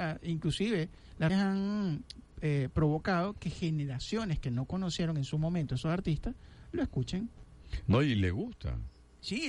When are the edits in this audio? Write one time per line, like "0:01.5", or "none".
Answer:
0:01.3